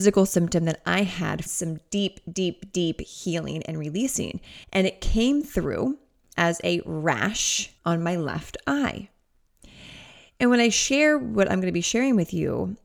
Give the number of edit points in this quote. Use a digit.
3